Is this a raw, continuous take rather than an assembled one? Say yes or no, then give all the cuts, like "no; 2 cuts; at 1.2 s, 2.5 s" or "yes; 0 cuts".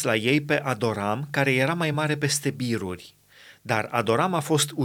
yes; 0 cuts